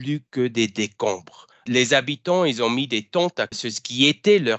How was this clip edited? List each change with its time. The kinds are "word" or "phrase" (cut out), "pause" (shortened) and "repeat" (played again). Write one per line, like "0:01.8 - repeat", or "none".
0:03.5 - word